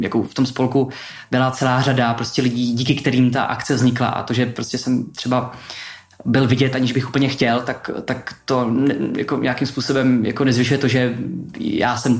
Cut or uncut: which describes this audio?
uncut